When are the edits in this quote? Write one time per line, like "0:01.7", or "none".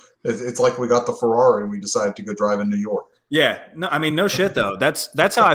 none

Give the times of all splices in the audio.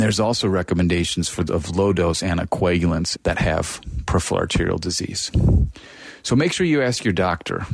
0:01.5
0:03.1

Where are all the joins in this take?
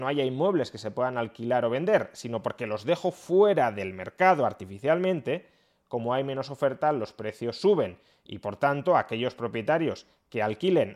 none

